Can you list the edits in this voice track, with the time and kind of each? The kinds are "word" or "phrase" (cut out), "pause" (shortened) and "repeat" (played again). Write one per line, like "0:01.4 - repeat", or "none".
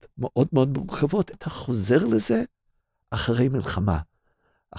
0:01.3 - word